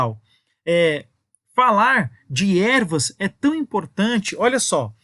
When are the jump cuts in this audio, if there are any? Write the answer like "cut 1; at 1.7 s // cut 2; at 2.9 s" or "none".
none